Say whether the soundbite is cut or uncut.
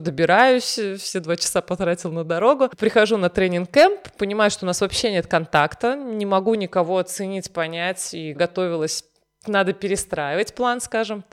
cut